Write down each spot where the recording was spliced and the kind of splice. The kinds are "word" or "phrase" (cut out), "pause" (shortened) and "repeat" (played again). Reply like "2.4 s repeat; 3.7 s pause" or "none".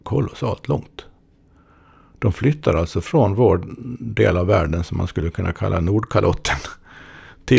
none